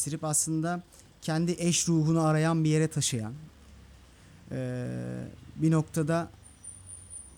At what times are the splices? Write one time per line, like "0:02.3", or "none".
none